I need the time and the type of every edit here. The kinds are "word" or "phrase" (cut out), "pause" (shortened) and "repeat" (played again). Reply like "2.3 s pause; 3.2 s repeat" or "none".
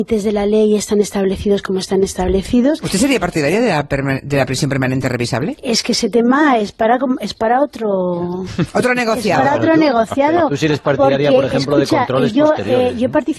none